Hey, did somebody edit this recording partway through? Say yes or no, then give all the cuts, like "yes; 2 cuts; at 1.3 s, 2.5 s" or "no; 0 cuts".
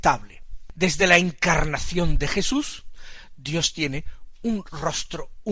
no; 0 cuts